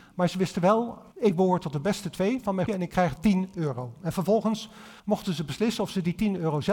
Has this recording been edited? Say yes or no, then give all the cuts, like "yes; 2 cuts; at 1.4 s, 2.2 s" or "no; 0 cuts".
yes; 4 cuts; at 1.1 s, 2.7 s, 3.2 s, 5.0 s